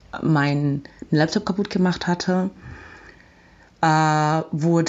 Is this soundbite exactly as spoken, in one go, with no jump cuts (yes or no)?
yes